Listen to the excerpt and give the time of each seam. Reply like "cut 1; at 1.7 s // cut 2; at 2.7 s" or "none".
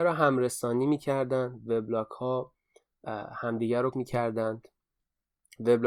cut 1; at 3.9 s